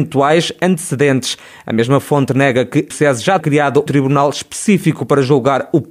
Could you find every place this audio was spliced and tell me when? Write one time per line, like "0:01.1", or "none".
0:02.9
0:03.4
0:03.9

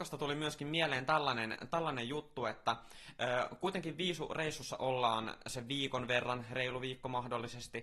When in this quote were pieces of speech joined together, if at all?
none

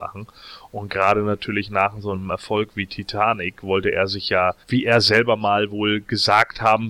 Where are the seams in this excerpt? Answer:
0:04.6

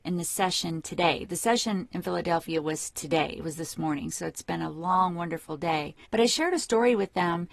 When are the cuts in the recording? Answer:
0:06.1

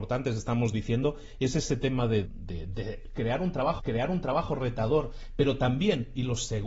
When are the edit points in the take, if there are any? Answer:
0:02.3
0:03.8

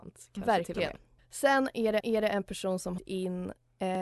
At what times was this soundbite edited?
0:01.2
0:02.0
0:03.0

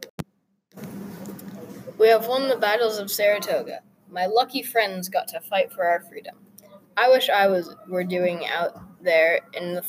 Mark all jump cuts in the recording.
none

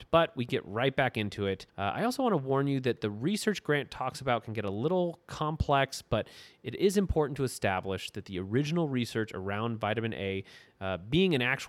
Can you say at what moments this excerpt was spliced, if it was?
0:01.7

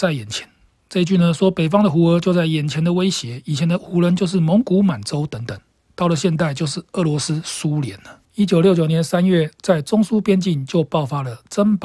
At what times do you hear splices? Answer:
0:08.2

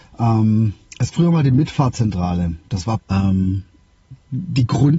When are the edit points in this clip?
0:01.1
0:03.0

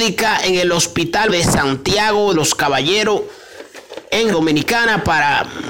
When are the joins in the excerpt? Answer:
0:01.3
0:02.3
0:04.3

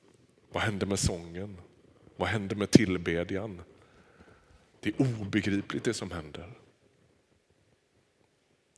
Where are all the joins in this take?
none

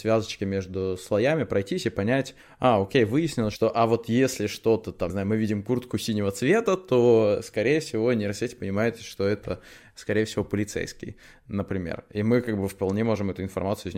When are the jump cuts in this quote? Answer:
0:05.1

